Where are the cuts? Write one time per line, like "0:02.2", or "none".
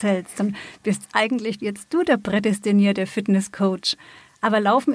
none